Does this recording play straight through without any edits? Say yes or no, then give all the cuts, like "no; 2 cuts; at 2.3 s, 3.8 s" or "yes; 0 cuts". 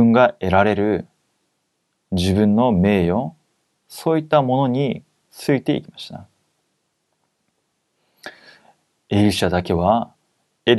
yes; 0 cuts